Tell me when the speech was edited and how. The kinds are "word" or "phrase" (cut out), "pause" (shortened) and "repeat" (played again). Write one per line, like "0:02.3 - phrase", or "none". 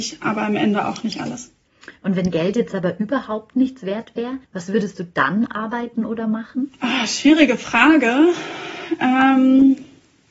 0:04.4 - pause